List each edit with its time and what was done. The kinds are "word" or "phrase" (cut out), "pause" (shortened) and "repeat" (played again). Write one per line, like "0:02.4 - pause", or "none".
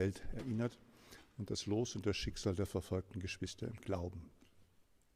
none

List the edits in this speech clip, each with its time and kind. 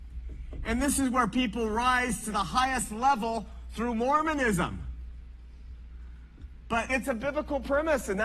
0:06.9 - word

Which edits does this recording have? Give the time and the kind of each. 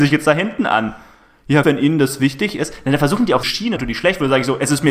0:01.6 - word
0:03.4 - word
0:03.8 - word

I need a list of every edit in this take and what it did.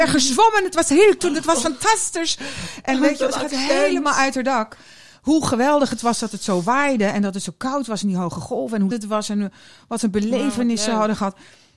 0:01.2 - word
0:08.9 - word

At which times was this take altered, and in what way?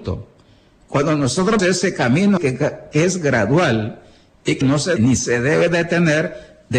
0:01.6 - word
0:02.4 - word
0:04.6 - word
0:05.0 - word

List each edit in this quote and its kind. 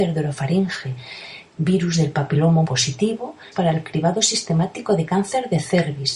0:01.5 - pause
0:02.6 - word
0:03.5 - phrase

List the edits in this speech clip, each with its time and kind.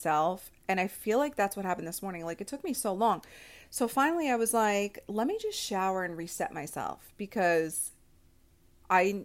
none

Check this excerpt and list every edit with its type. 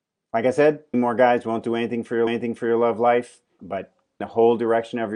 0:00.9 - word
0:02.3 - repeat
0:03.6 - word
0:04.2 - word

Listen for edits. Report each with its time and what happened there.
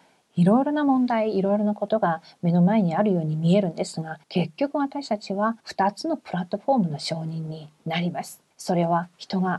0:04.2 - pause
0:05.6 - pause
0:08.5 - pause

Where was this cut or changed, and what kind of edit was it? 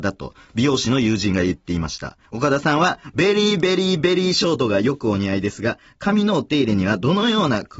0:02.3 - pause

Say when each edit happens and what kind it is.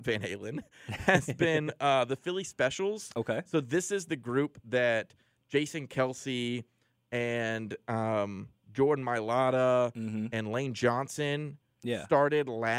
none

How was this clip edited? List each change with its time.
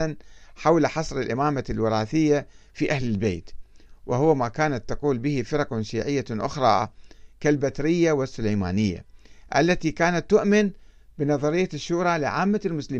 none

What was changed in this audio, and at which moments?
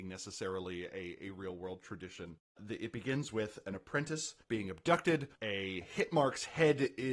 0:04.4 - pause
0:05.4 - pause

